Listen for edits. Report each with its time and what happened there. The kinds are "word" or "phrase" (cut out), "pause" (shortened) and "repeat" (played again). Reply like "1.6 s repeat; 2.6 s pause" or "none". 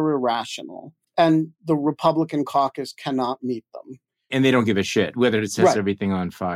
1.0 s pause

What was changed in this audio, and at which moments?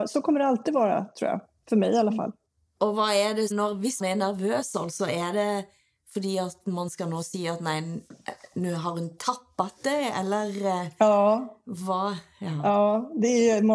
3.5 s word; 4.0 s word

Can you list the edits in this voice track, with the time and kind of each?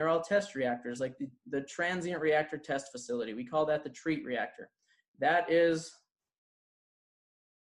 none

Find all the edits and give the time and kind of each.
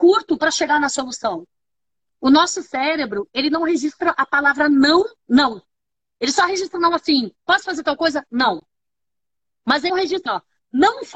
5.2 s pause; 7.4 s pause; 9.9 s word; 10.3 s word

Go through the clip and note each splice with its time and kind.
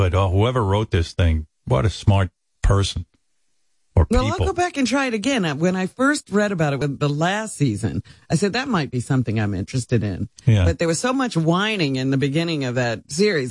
none

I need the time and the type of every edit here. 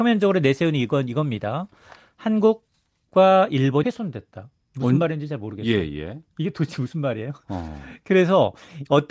3.8 s phrase

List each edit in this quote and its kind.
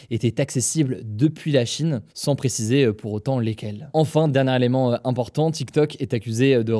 2.1 s pause

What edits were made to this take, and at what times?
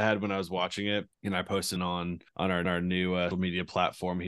1.1 s pause; 1.8 s word; 2.3 s pause; 2.6 s repeat; 3.3 s word

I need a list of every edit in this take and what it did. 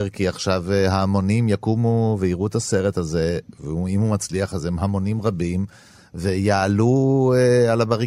none

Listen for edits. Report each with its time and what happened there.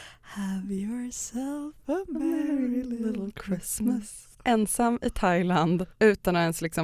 4.3 s pause; 5.9 s pause

